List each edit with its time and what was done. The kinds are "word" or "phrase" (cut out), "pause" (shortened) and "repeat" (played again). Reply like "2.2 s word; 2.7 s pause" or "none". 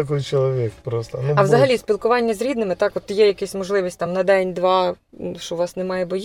none